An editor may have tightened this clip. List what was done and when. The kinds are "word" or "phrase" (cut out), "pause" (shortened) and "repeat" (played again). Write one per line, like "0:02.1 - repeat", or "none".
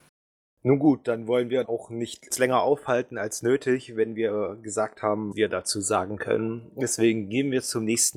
0:01.6 - word
0:02.3 - word
0:05.3 - word